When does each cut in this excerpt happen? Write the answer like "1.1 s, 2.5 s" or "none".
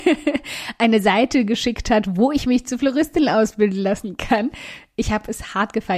none